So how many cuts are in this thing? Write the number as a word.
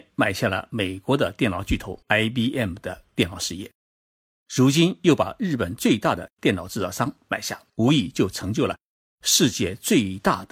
two